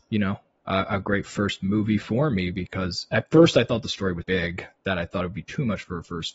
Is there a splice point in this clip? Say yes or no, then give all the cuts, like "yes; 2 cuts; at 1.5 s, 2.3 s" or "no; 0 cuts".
yes; 1 cut; at 4.2 s